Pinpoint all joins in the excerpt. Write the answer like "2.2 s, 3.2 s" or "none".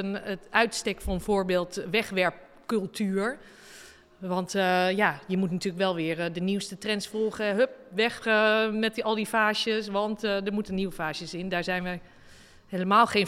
none